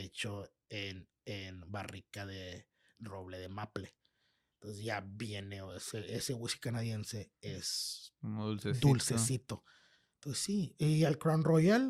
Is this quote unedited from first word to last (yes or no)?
yes